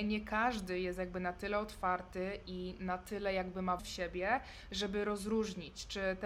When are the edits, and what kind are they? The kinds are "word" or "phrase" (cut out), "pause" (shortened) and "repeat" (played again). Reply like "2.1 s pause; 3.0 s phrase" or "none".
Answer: 3.8 s word